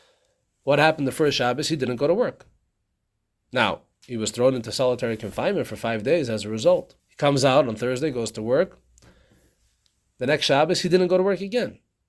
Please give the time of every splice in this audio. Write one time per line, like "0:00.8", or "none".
0:07.0